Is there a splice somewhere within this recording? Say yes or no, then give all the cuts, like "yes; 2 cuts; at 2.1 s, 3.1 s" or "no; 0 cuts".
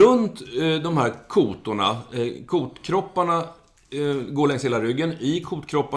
no; 0 cuts